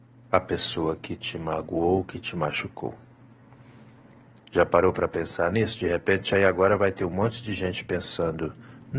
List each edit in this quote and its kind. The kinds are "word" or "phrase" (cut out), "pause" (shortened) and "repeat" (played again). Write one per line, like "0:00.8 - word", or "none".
none